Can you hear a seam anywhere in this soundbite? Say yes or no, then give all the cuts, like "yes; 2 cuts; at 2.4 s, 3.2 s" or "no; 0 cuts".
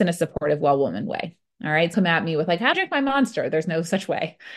yes; 2 cuts; at 1.9 s, 2.7 s